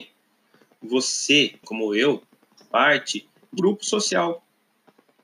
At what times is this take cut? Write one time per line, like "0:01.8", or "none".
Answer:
0:01.6
0:02.6
0:03.6